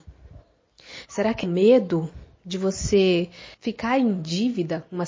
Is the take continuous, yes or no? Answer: no